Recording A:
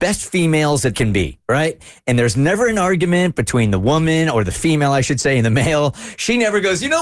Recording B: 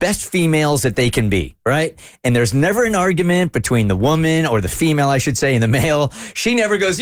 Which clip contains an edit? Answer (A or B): A